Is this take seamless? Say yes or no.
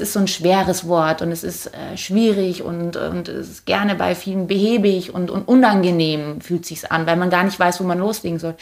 yes